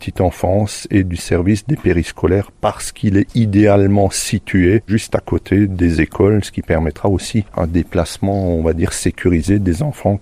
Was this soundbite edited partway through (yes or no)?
no